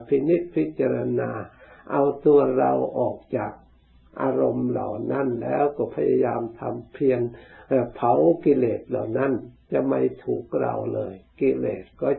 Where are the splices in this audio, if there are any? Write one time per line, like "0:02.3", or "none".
none